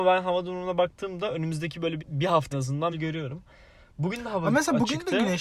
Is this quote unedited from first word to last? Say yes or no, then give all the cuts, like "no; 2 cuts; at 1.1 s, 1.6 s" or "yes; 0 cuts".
no; 3 cuts; at 2.0 s, 2.5 s, 2.9 s